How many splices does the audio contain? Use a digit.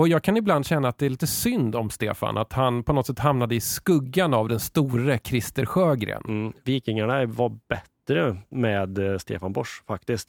0